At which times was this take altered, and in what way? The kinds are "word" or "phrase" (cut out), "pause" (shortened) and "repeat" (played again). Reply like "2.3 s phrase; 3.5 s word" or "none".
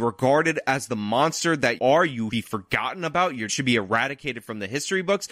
1.8 s word; 2.3 s word; 3.5 s word